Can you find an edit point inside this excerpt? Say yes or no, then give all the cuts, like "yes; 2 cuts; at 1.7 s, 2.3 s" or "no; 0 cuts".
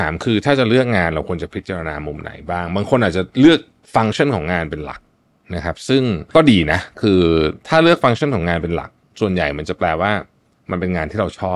no; 0 cuts